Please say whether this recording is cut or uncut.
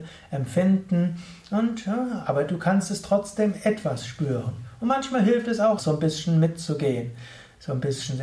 cut